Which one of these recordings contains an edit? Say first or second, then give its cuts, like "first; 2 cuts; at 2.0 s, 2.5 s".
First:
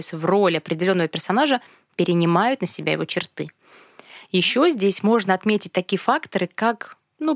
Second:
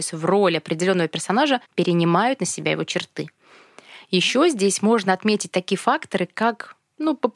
second; 1 cut; at 1.6 s